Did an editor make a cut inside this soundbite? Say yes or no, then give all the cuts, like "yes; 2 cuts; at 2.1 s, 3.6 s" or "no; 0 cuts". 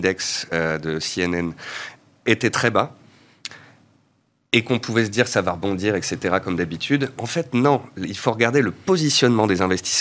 no; 0 cuts